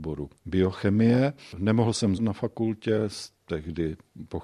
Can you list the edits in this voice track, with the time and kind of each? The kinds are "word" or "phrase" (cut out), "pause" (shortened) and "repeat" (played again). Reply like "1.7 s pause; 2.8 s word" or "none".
2.2 s word